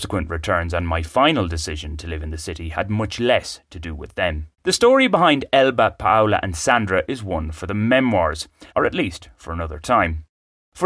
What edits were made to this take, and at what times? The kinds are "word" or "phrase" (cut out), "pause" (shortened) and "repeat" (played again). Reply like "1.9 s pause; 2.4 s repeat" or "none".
4.5 s pause; 8.7 s pause